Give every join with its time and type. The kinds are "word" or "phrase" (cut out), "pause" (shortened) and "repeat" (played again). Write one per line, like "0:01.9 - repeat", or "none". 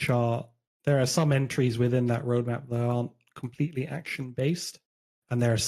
none